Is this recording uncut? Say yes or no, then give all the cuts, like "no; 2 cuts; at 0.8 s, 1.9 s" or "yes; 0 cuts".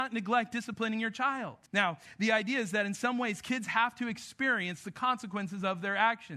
no; 1 cut; at 1.7 s